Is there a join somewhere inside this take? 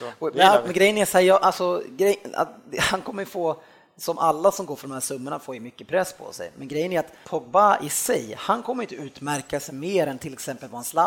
yes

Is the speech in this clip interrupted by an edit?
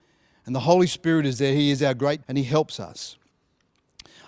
yes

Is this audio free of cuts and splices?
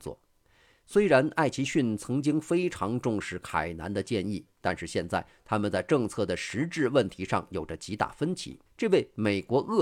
no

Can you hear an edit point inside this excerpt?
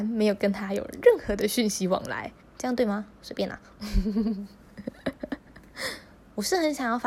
yes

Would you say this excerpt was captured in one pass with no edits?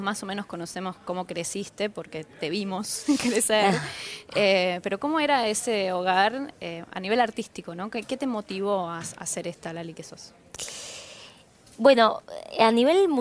yes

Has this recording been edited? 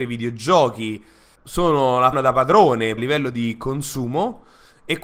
yes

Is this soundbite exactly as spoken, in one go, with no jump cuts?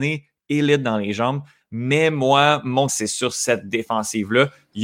no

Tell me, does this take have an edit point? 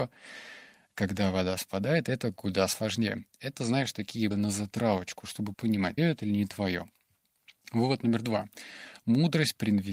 yes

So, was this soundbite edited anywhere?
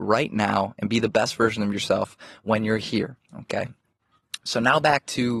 yes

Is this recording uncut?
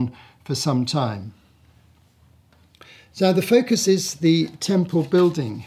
yes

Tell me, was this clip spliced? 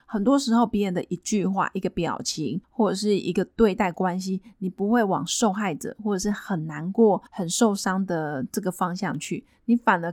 yes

